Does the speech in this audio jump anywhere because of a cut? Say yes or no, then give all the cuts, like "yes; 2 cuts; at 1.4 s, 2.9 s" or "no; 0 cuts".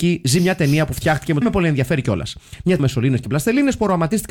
yes; 2 cuts; at 1.4 s, 2.8 s